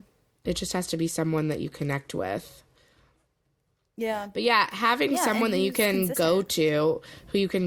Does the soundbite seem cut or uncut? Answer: uncut